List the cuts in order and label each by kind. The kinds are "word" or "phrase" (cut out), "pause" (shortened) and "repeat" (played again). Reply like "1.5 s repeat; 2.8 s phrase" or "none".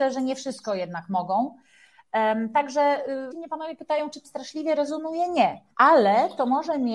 3.3 s word; 4.2 s word; 5.7 s pause